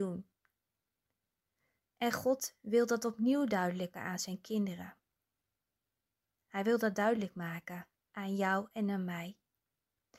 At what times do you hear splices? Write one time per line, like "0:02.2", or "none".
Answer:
0:03.9